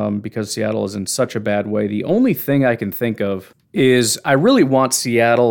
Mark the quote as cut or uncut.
cut